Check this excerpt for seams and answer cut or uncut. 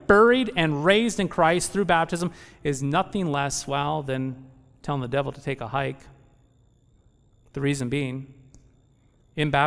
uncut